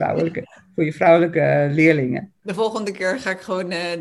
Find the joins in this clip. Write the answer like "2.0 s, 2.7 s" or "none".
2.4 s